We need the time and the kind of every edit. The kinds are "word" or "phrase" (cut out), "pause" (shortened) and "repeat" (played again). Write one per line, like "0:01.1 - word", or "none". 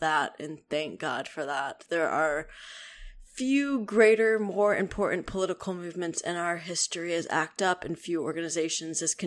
none

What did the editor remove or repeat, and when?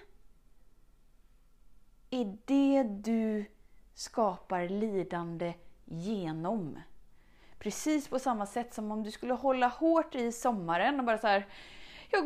none

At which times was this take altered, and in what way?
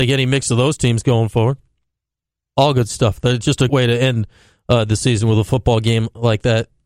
0:02.0 - pause
0:03.7 - word

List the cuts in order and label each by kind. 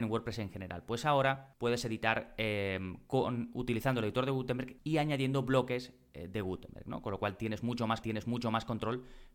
0:08.0 - repeat

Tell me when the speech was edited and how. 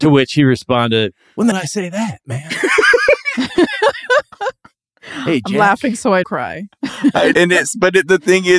0:01.5 - word
0:06.2 - word
0:07.3 - word

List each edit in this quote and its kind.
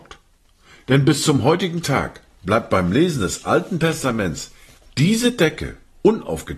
none

